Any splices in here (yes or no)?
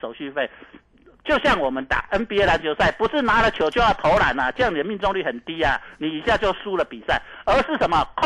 no